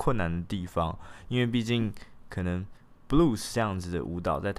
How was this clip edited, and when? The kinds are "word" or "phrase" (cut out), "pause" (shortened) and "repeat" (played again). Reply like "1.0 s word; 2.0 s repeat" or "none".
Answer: none